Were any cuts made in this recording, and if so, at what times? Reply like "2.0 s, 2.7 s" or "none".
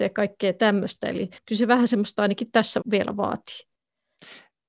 1.4 s, 2.1 s, 2.8 s